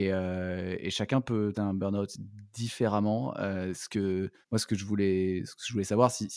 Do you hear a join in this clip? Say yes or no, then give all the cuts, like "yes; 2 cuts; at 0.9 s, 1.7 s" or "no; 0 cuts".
yes; 2 cuts; at 1.5 s, 4.4 s